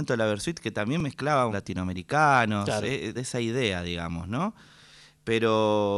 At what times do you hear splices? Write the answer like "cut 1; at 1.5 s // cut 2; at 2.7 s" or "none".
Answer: cut 1; at 1.5 s // cut 2; at 3.2 s